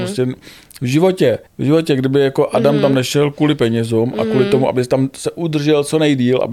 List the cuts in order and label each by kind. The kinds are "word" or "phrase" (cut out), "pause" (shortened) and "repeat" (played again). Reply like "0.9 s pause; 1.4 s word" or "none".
1.5 s pause